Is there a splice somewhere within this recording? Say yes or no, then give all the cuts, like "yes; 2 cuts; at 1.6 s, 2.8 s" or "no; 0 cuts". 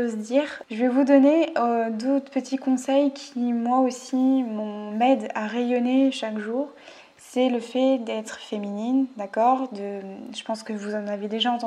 no; 0 cuts